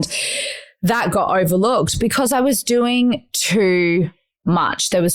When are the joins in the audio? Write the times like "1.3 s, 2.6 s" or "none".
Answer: none